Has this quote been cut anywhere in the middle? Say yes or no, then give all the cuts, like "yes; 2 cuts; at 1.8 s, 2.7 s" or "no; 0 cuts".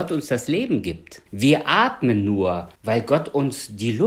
yes; 2 cuts; at 1.3 s, 2.8 s